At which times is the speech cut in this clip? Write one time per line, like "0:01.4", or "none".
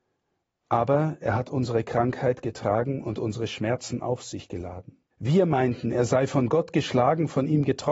0:05.1

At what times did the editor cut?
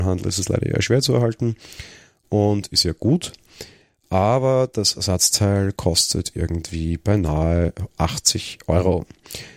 none

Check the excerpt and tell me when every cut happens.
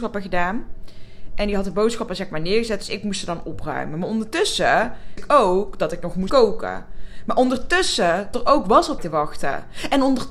0:05.2
0:06.3
0:08.3
0:09.0

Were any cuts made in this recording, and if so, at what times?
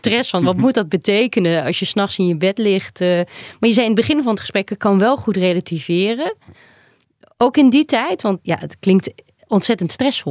0:08.4

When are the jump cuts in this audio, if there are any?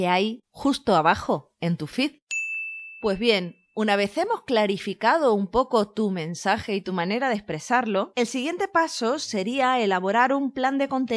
none

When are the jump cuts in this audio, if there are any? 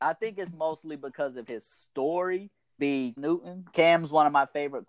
0:02.8
0:03.2
0:03.7

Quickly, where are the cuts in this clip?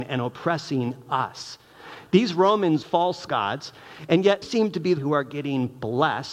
0:02.8
0:03.3
0:04.4
0:05.0

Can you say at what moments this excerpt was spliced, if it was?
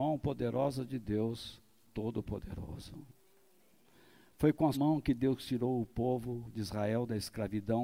0:01.9
0:04.7

